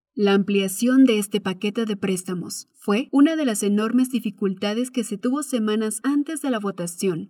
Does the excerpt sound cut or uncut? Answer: uncut